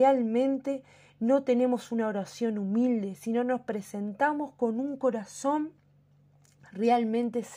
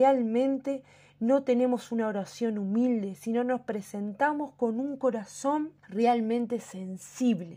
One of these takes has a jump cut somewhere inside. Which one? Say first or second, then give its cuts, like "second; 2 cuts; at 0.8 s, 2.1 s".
second; 1 cut; at 5.8 s